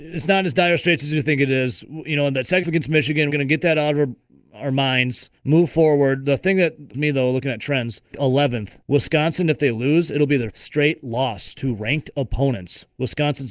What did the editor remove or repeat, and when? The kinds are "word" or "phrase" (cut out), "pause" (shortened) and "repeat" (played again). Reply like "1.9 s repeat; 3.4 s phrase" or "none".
2.6 s word; 3.3 s word; 5.4 s pause; 6.9 s word; 8.1 s phrase; 8.8 s pause; 10.5 s word